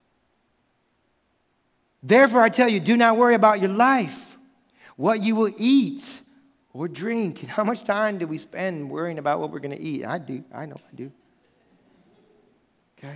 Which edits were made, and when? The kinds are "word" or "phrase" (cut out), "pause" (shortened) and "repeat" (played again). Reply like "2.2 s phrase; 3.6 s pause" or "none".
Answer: none

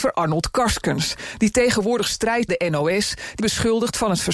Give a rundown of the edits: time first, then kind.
2.5 s word; 3.4 s word

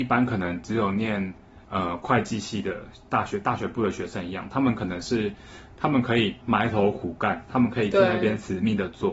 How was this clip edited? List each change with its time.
1.6 s pause

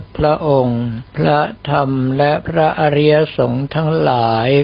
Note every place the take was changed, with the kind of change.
1.1 s pause

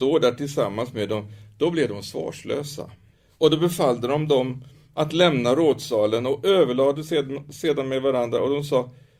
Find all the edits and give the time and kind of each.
3.1 s pause

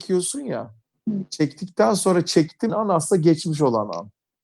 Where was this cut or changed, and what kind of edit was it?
2.7 s word

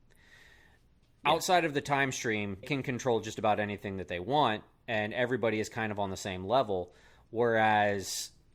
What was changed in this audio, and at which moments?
2.6 s word

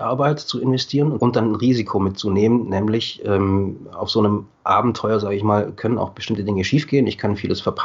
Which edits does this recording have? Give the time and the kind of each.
1.2 s phrase

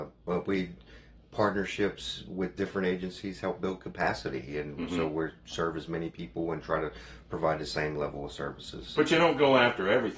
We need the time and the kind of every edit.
none

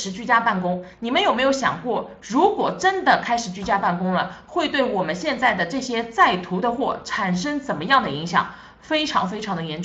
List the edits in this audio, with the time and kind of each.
none

